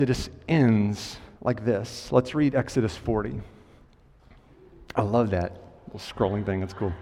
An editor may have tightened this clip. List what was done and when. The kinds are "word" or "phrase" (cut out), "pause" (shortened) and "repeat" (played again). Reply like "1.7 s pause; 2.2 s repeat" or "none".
1.3 s pause